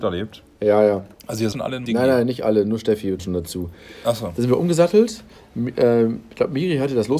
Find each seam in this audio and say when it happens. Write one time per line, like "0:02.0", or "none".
0:01.5
0:01.9
0:03.2